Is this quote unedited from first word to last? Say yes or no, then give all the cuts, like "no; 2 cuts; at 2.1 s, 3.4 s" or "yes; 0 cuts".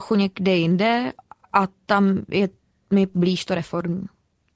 yes; 0 cuts